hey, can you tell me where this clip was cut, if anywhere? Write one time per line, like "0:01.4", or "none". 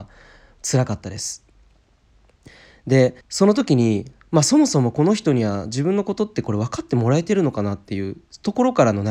0:03.2